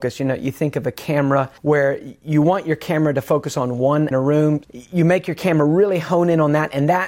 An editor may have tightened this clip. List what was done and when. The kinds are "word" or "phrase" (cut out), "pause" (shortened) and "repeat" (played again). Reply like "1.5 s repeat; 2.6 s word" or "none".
1.6 s pause; 4.1 s phrase; 4.6 s word